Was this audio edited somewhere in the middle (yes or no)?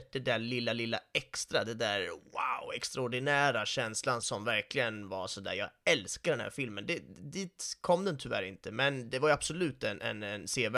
yes